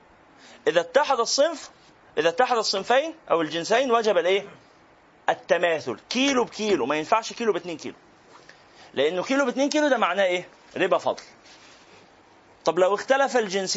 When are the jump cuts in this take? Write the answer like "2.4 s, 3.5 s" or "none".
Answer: 10.7 s